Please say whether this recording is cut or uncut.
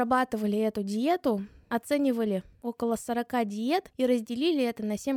uncut